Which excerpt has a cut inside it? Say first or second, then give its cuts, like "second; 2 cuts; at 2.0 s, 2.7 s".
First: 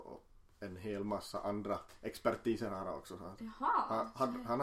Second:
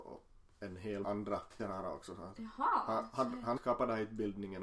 second; 3 cuts; at 1.0 s, 1.6 s, 3.6 s